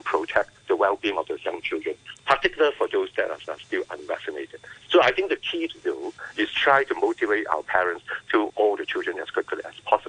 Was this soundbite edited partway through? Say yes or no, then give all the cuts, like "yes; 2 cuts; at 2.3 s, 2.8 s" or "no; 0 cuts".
yes; 2 cuts; at 3.5 s, 8.5 s